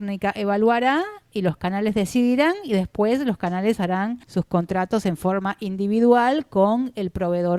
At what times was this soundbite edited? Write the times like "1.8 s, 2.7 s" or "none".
4.2 s